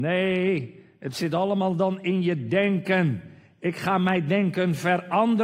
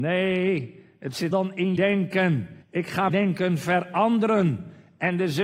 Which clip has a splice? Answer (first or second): second